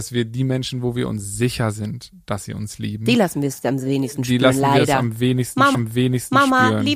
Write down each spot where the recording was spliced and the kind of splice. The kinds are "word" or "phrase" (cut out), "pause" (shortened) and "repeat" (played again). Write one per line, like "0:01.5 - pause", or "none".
0:05.7 - repeat